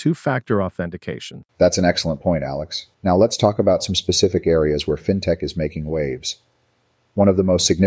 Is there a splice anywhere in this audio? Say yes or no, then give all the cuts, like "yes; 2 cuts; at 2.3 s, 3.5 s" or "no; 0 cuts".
yes; 2 cuts; at 1.5 s, 2.9 s